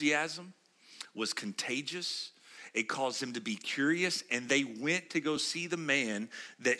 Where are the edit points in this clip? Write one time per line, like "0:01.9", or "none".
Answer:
none